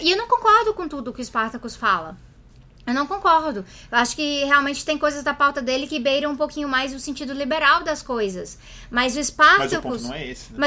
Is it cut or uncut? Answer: uncut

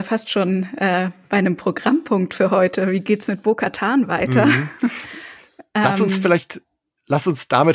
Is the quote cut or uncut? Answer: uncut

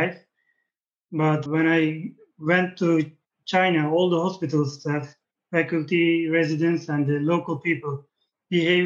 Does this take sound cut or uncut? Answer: cut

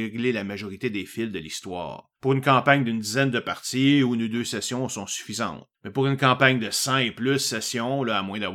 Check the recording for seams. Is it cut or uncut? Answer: cut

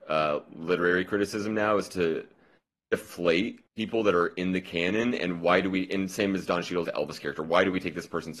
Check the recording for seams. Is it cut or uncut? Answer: cut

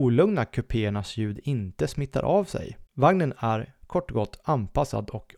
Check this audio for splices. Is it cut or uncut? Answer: uncut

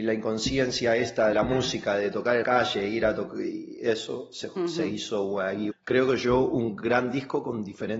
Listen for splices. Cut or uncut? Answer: cut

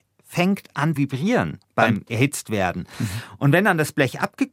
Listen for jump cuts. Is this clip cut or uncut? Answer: cut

